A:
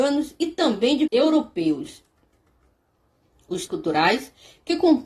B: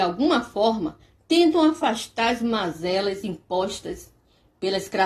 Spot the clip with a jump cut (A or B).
A